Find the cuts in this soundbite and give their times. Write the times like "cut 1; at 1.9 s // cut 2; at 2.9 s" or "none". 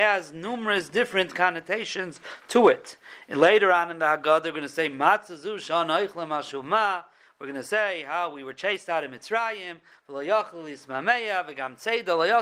none